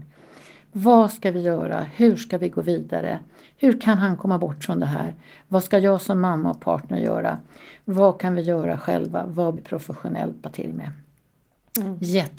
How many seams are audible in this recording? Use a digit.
2